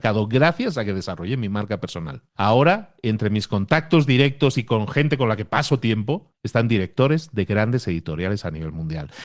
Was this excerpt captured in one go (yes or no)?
no